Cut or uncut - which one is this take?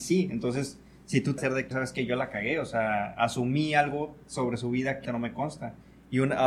cut